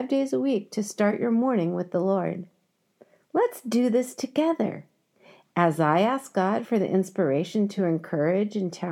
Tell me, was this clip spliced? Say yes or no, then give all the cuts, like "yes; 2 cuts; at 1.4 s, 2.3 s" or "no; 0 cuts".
no; 0 cuts